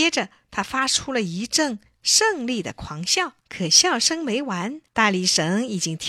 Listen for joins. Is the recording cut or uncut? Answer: cut